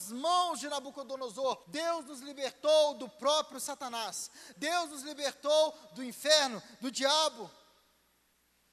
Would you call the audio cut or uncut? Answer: cut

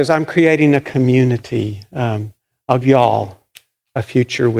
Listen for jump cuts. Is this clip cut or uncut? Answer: cut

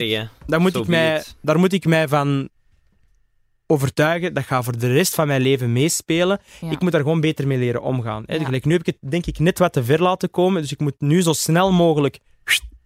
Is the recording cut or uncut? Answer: uncut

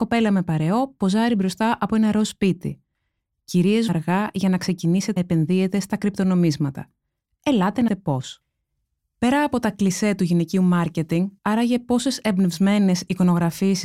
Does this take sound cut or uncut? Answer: cut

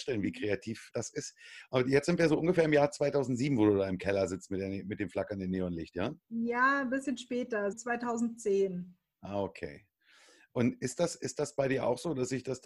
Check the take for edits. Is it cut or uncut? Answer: cut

